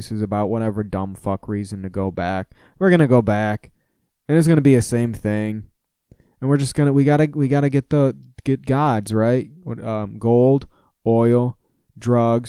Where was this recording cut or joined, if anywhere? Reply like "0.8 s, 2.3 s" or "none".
none